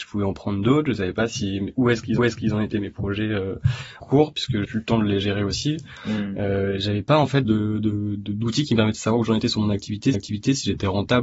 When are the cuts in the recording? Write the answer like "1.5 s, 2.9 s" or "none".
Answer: 2.2 s, 4.0 s, 4.6 s, 7.4 s, 10.1 s